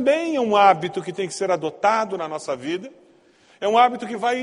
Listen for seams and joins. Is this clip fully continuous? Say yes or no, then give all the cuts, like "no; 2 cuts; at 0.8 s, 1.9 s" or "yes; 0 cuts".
yes; 0 cuts